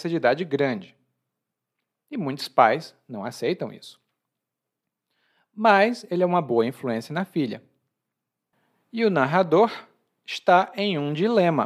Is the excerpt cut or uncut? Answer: uncut